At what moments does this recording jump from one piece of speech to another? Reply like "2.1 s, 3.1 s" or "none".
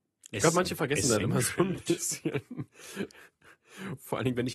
1.2 s